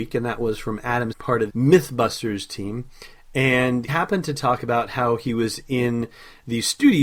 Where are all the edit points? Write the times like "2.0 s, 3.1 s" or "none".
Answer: 1.1 s, 1.5 s, 3.9 s

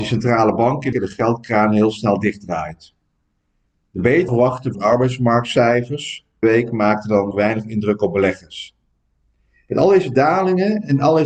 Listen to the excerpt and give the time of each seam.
0.9 s, 4.3 s, 4.7 s, 6.4 s, 7.3 s

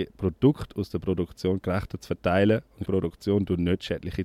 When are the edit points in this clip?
2.9 s

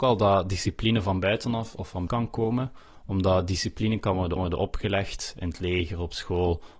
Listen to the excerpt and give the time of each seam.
2.1 s, 4.4 s

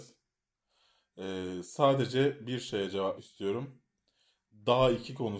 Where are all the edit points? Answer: 3.2 s

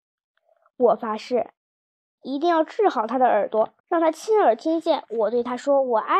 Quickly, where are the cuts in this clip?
3.8 s

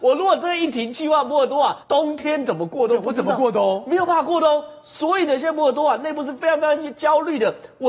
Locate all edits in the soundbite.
1.8 s

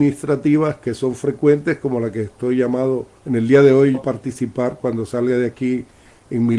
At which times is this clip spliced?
3.2 s, 3.9 s

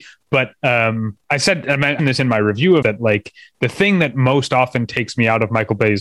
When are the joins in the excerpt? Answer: 1.2 s, 2.0 s, 2.8 s

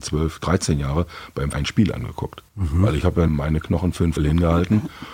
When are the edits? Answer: 1.5 s, 2.5 s, 3.3 s, 4.2 s

